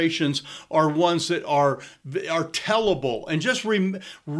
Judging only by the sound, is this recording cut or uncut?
uncut